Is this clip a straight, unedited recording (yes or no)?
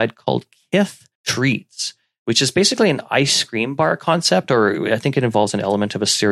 no